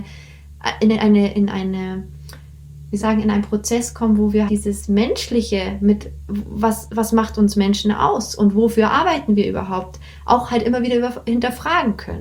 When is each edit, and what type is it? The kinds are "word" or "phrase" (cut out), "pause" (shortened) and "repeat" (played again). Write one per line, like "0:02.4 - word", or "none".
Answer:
0:03.0 - word
0:04.5 - word